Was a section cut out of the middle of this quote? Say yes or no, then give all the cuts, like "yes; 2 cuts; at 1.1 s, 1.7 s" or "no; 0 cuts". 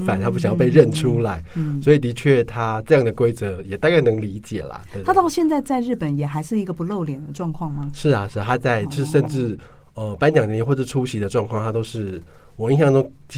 no; 0 cuts